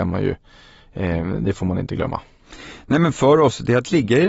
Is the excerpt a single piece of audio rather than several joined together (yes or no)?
yes